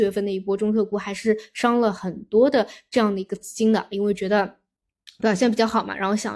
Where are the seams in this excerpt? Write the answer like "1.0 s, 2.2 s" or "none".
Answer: none